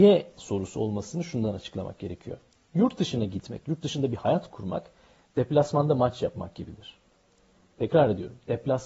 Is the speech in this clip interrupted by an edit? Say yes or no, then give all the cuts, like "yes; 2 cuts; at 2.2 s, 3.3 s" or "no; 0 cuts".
no; 0 cuts